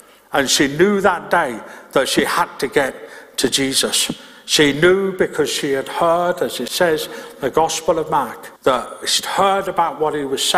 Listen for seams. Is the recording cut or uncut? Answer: cut